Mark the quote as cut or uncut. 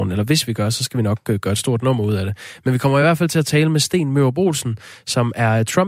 uncut